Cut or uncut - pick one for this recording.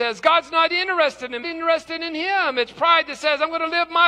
cut